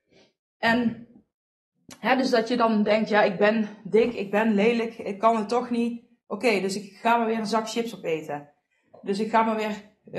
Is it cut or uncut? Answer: uncut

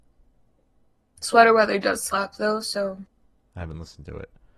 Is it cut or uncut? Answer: uncut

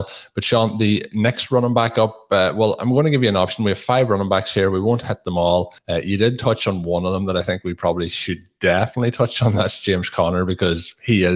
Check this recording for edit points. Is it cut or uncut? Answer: cut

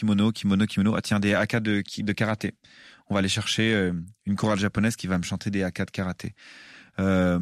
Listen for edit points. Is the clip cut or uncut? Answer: uncut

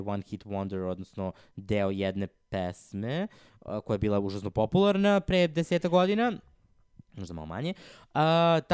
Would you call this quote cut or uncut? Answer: uncut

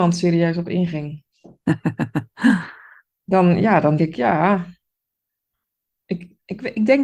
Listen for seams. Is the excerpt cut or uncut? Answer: cut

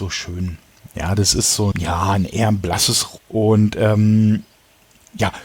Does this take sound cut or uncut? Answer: cut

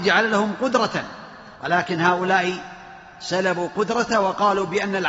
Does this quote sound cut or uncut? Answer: cut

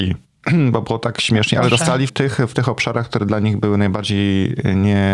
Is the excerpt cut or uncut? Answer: cut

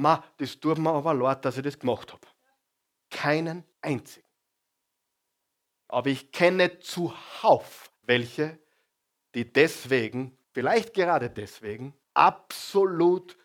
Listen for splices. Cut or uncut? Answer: cut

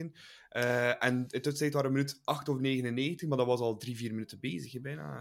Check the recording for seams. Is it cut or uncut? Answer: uncut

